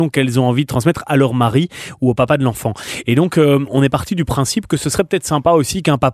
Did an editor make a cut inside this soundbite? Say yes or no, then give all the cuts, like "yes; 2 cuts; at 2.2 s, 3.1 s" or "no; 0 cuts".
no; 0 cuts